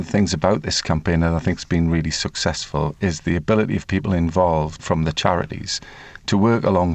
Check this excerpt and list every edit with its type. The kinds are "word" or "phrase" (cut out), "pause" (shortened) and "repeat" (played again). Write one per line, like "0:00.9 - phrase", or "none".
0:04.8 - word